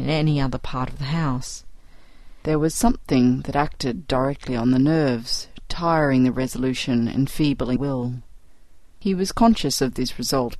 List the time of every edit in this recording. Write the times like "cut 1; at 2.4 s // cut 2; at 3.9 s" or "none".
cut 1; at 7.8 s